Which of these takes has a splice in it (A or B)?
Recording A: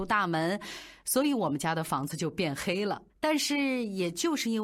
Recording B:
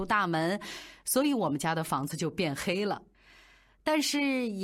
A